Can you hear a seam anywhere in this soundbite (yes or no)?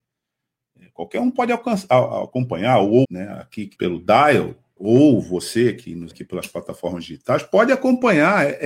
yes